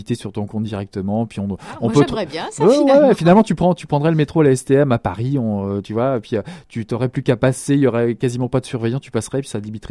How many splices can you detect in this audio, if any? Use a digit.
0